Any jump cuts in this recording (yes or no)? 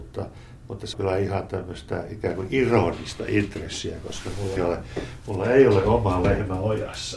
yes